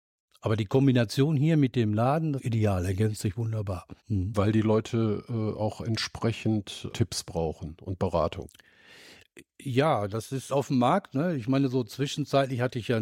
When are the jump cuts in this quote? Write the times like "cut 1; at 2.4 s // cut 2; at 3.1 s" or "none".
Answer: cut 1; at 2.4 s // cut 2; at 4.0 s // cut 3; at 6.9 s // cut 4; at 10.5 s

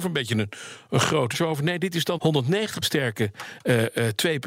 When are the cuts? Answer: cut 1; at 1.3 s // cut 2; at 2.2 s // cut 3; at 2.8 s

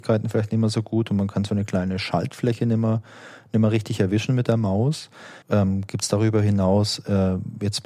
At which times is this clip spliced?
cut 1; at 5.4 s

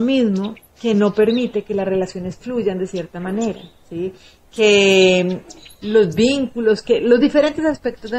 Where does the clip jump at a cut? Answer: none

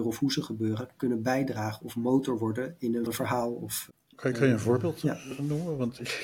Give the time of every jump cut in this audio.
cut 1; at 3.1 s

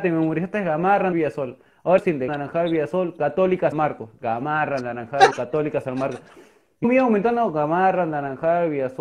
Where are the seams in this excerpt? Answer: cut 1; at 1.1 s // cut 2; at 2.0 s // cut 3; at 2.3 s // cut 4; at 3.7 s // cut 5; at 5.3 s // cut 6; at 6.8 s

